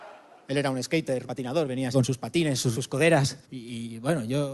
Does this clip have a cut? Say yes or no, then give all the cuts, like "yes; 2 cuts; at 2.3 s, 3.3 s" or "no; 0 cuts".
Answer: yes; 4 cuts; at 1.3 s, 1.9 s, 2.7 s, 3.4 s